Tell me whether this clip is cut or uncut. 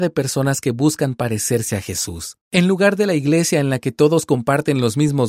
cut